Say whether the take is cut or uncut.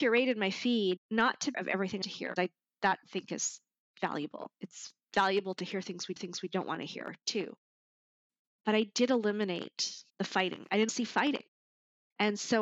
cut